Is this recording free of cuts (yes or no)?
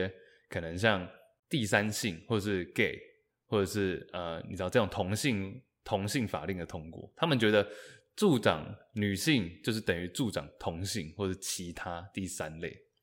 yes